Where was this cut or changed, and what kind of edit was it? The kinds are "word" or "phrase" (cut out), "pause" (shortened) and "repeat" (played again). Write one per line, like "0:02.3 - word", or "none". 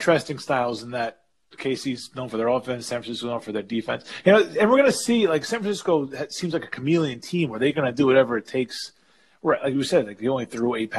none

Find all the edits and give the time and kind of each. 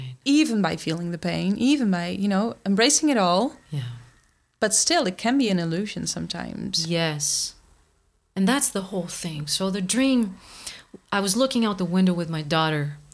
none

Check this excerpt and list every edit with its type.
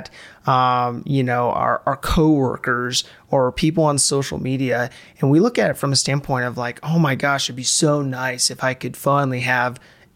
none

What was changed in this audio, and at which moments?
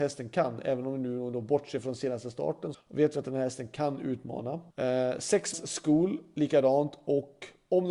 0:02.7 - word
0:04.7 - pause
0:05.5 - word

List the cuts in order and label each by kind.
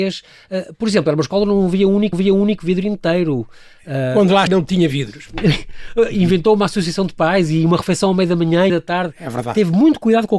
0:02.1 - repeat
0:04.5 - word
0:08.7 - phrase

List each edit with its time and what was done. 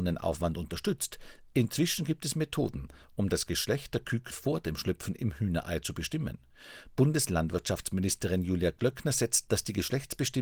0:04.3 - word
0:09.5 - word

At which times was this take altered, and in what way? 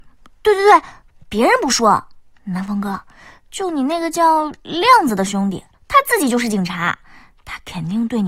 0:05.7 - pause

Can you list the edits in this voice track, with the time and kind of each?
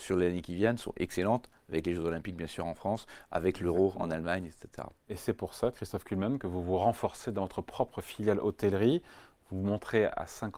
none

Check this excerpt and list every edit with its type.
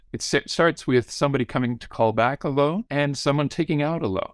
0:02.9 - pause

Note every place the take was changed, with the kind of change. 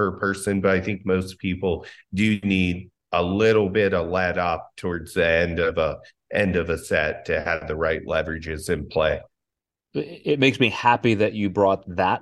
none

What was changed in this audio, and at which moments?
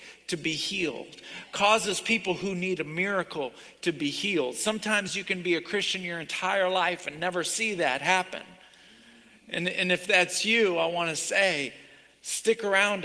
none

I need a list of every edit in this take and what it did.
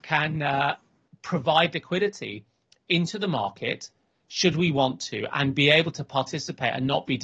none

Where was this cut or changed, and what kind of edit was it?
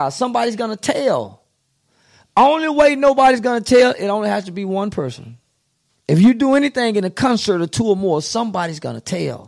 none

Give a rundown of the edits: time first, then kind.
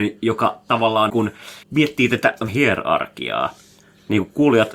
0:01.1 - word
0:01.6 - word
0:02.5 - word

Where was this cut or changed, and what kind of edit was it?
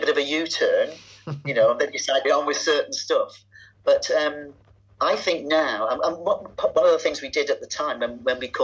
0:02.2 - phrase

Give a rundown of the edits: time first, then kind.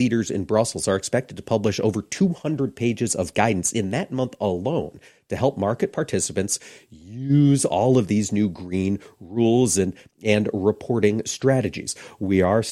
none

